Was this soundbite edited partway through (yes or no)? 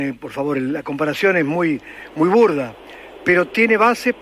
no